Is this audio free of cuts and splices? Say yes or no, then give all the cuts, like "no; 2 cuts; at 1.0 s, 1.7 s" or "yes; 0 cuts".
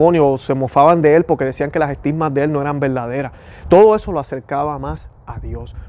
yes; 0 cuts